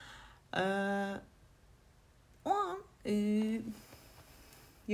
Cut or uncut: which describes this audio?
uncut